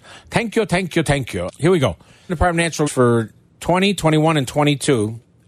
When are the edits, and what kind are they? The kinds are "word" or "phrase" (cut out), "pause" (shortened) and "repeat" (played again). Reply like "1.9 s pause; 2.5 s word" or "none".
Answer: 1.5 s word; 2.3 s word; 2.9 s word